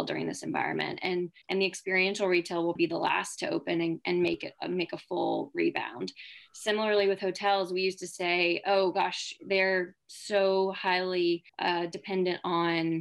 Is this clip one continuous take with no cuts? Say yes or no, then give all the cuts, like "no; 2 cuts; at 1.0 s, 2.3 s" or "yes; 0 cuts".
no; 3 cuts; at 1.4 s, 2.8 s, 11.5 s